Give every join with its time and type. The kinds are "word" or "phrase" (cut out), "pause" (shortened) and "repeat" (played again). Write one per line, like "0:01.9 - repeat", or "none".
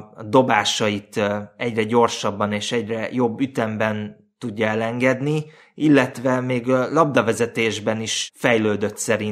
none

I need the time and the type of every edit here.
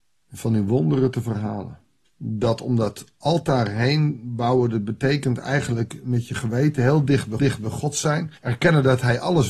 0:02.1 - pause
0:07.4 - repeat
0:08.4 - pause

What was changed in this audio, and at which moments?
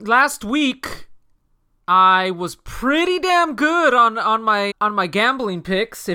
0:04.7 - word

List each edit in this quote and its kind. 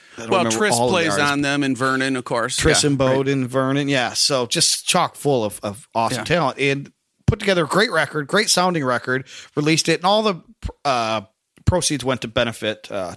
none

